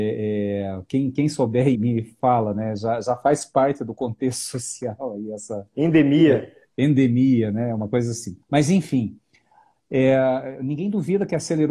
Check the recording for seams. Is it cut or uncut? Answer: cut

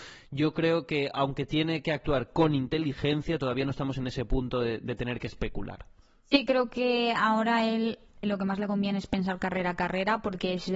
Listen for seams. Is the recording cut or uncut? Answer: cut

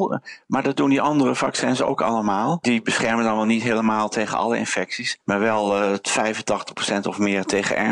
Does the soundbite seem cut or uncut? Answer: uncut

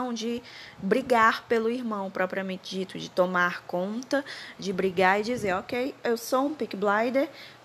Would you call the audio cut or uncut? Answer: uncut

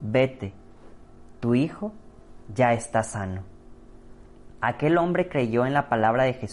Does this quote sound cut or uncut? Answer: uncut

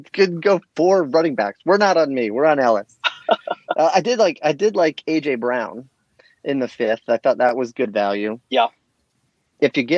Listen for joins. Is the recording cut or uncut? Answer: cut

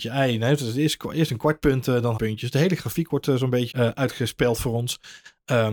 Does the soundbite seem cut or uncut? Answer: cut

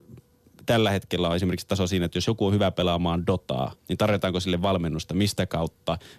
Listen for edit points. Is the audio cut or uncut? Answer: cut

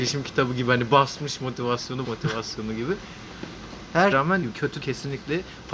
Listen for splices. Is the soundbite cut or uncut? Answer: cut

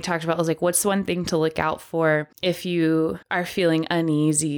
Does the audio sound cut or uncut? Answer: cut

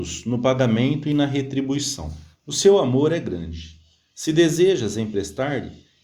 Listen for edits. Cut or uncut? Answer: cut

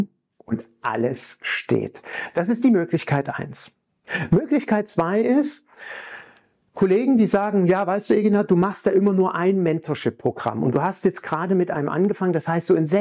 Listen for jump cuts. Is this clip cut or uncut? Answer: uncut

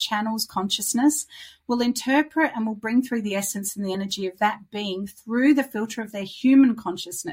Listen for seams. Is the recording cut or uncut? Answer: uncut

